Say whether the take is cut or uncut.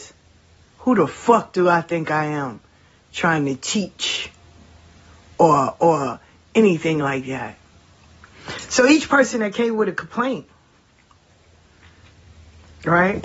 uncut